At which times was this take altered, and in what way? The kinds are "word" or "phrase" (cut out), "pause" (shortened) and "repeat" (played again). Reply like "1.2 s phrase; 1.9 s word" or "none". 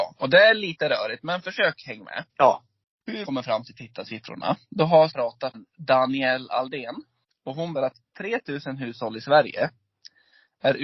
2.3 s pause; 3.2 s word; 5.1 s word; 5.5 s word; 7.2 s pause; 7.7 s word